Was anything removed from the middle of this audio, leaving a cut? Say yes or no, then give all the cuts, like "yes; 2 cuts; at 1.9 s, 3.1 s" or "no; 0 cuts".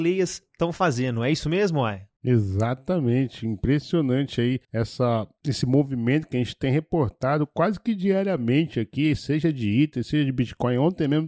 no; 0 cuts